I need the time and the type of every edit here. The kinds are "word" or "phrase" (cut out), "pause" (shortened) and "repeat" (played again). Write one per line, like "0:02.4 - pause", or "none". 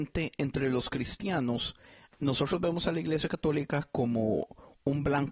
none